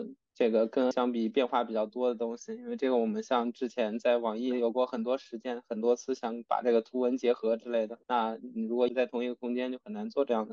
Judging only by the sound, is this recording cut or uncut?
cut